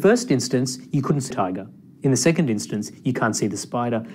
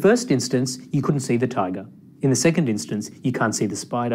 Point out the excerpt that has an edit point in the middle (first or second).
first